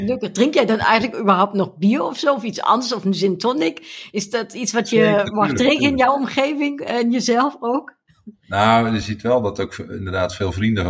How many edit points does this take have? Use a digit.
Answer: 0